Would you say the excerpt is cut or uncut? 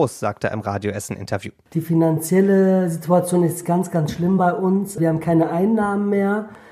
uncut